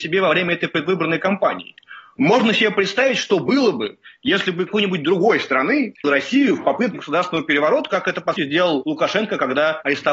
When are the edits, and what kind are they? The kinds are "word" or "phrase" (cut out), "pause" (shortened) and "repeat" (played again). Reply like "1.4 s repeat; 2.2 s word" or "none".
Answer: 4.7 s word; 6.0 s word; 6.9 s word; 8.4 s word